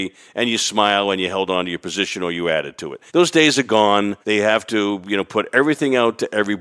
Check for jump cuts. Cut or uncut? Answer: cut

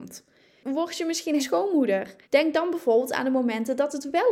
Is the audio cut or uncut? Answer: cut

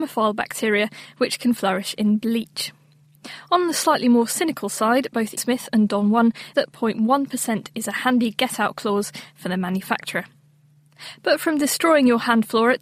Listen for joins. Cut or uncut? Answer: cut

